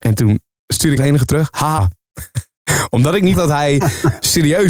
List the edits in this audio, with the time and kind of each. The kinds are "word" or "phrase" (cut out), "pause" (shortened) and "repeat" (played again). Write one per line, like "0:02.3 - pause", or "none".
0:01.0 - word
0:01.8 - word
0:03.3 - word